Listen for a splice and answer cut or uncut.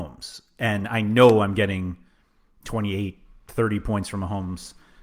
uncut